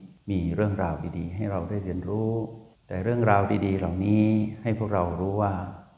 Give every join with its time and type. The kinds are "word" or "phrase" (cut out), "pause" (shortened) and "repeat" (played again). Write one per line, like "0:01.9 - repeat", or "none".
0:02.7 - pause